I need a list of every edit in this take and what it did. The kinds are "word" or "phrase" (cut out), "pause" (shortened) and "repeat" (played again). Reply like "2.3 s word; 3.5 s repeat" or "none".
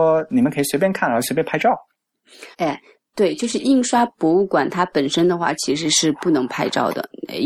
2.5 s pause